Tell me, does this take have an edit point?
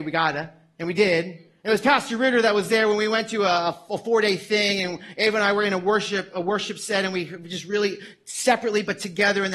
no; 0 cuts

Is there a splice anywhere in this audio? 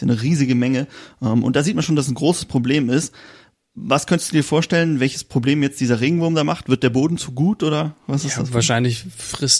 no; 0 cuts

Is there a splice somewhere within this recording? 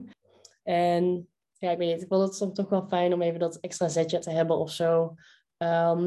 yes; 1 cut; at 1.4 s

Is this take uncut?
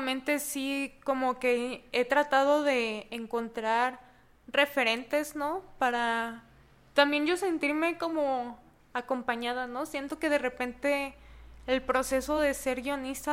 yes; 0 cuts

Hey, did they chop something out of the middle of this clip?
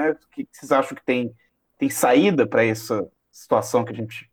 no; 0 cuts

